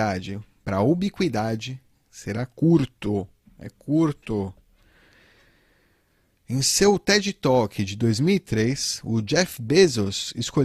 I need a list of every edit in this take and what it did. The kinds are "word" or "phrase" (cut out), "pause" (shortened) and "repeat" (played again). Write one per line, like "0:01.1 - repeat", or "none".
none